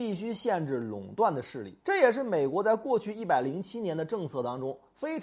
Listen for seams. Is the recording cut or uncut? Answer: cut